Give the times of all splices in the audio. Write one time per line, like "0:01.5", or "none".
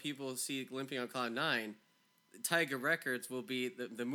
none

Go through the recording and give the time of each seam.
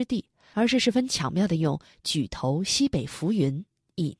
none

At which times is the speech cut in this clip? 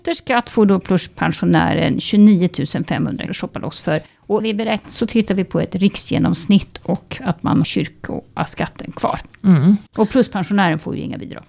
0:03.3
0:04.4
0:04.8
0:07.6
0:09.9

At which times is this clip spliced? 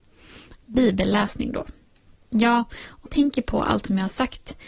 0:03.1

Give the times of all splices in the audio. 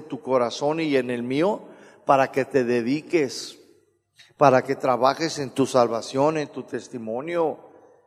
none

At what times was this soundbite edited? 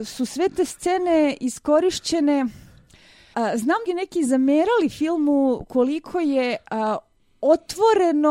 0:03.3
0:03.9

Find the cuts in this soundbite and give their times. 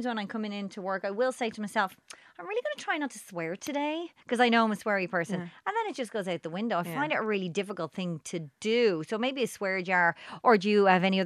0:04.2

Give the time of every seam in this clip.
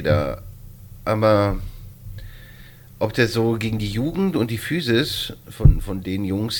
none

